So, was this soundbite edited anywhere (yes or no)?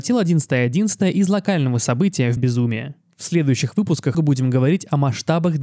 yes